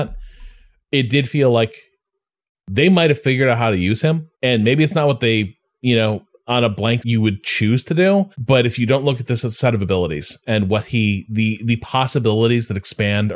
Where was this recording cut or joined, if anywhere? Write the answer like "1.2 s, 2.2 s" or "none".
4.3 s, 7.0 s, 8.3 s